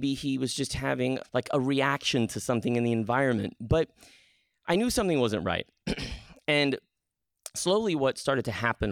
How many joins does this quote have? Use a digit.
1